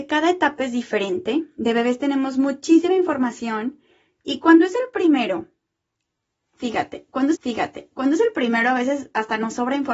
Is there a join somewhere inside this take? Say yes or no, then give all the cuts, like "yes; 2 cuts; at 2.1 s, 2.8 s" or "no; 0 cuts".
yes; 1 cut; at 7.3 s